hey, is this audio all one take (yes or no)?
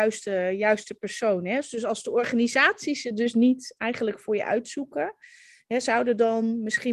yes